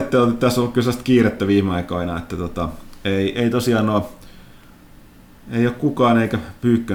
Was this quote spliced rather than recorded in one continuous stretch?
no; 0 cuts

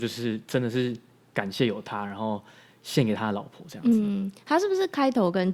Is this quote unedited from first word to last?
yes; 0 cuts

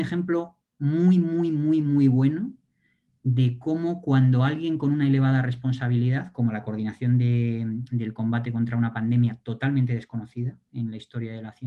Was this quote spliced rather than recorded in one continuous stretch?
no; 0 cuts

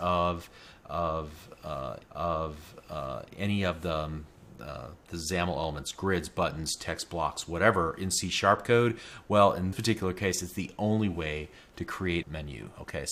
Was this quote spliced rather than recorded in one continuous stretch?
yes; 3 cuts; at 2.0 s, 9.7 s, 12.2 s

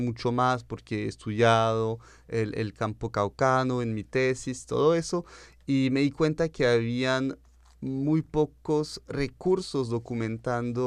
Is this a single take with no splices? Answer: yes; 0 cuts

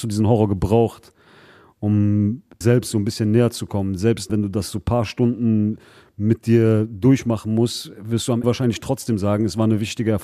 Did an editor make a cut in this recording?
yes; 3 cuts; at 2.6 s, 4.3 s, 8.4 s

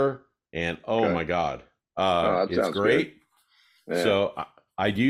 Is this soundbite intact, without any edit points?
yes; 0 cuts

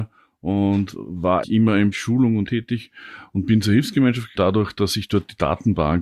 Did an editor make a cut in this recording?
yes; 4 cuts; at 1.4 s, 1.9 s, 2.5 s, 4.4 s

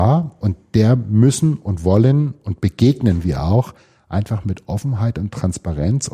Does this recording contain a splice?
no; 0 cuts

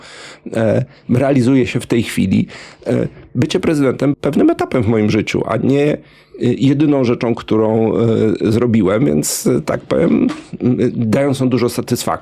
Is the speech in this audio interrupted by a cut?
yes; 1 cut; at 4.1 s

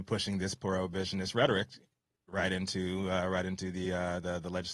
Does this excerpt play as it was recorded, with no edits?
yes; 0 cuts

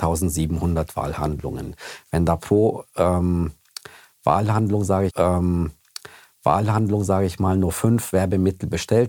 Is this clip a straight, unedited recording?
no; 1 cut; at 5.1 s

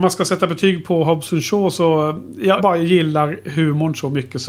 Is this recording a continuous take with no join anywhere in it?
no; 1 cut; at 2.6 s

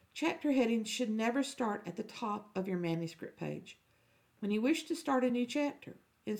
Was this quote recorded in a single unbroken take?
yes; 0 cuts

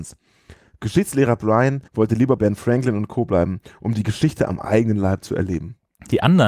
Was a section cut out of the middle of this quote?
yes; 2 cuts; at 1.9 s, 2.4 s

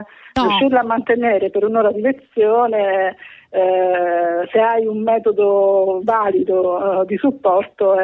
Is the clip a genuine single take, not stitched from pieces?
yes; 0 cuts

